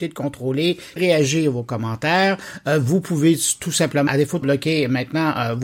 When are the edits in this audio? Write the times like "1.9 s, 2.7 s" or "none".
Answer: 1.0 s, 4.1 s, 4.4 s